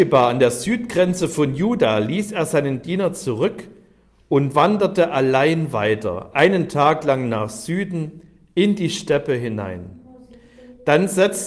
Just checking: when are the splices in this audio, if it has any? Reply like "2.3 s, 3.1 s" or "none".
none